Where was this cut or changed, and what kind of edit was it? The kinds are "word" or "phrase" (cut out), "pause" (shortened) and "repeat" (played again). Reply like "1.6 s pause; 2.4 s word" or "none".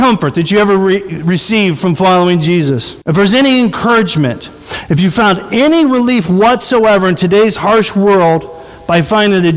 3.0 s pause